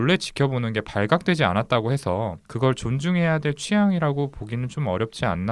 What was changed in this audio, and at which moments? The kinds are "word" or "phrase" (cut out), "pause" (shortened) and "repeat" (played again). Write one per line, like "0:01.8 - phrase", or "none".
0:02.4 - pause